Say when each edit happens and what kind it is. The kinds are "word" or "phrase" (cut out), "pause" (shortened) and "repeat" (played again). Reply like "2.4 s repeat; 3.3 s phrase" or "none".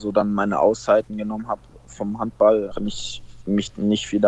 2.7 s word